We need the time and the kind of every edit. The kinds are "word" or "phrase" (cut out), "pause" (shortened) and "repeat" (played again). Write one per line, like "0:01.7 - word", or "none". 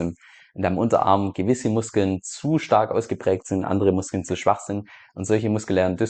none